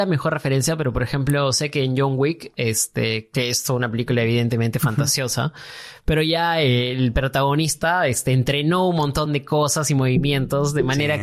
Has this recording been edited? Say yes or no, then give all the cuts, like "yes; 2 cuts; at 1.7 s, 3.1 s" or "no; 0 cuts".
no; 0 cuts